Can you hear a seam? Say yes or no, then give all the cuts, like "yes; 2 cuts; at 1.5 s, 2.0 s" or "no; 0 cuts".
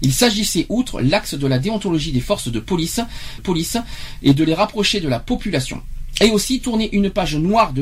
yes; 1 cut; at 3.4 s